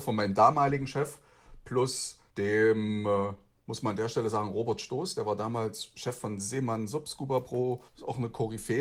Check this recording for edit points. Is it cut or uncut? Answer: cut